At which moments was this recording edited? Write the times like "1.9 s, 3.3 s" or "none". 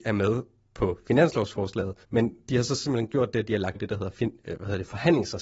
2.0 s, 3.8 s